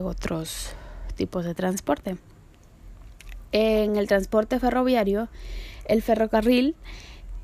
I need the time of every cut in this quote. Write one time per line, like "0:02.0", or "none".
none